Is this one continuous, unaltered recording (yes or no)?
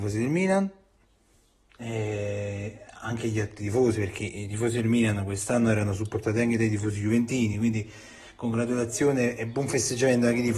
yes